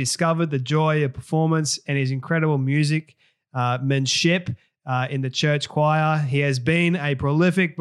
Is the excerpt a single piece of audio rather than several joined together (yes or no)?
yes